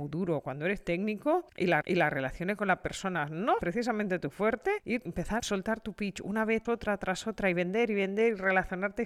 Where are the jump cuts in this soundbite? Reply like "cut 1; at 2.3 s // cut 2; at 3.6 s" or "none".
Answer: cut 1; at 1.8 s // cut 2; at 3.6 s // cut 3; at 5.1 s // cut 4; at 5.4 s // cut 5; at 6.6 s